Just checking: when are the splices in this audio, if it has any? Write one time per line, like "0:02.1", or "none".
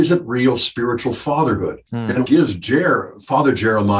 0:02.2